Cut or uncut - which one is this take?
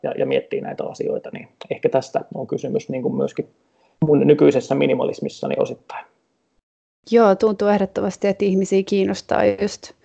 uncut